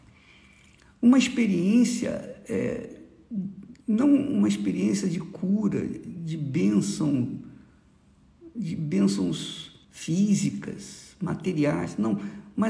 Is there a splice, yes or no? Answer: yes